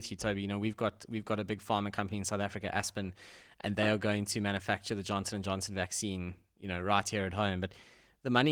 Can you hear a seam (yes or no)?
no